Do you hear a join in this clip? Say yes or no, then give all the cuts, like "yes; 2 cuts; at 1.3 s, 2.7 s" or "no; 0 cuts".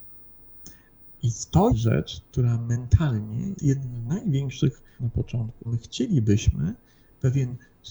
yes; 4 cuts; at 1.7 s, 3.5 s, 5.0 s, 5.6 s